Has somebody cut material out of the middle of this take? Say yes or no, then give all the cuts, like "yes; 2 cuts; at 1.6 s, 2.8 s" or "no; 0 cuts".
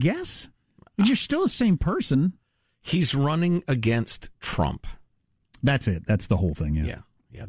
no; 0 cuts